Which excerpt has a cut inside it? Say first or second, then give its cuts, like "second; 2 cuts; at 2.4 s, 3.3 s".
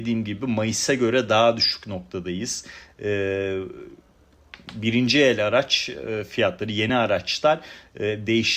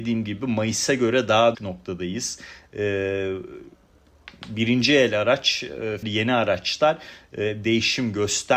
second; 2 cuts; at 1.5 s, 6.0 s